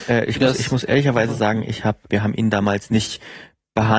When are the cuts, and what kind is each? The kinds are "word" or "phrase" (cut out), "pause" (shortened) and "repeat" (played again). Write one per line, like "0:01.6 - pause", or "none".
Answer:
0:02.1 - word